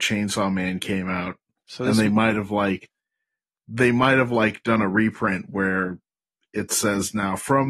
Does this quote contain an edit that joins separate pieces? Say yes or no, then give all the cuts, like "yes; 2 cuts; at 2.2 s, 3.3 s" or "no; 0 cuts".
no; 0 cuts